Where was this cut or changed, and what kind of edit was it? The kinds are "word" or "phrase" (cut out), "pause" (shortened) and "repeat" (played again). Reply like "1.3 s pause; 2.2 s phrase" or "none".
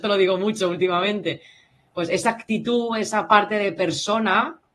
none